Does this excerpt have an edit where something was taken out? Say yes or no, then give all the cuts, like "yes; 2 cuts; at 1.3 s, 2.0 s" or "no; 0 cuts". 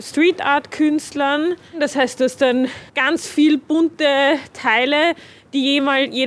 yes; 1 cut; at 2.9 s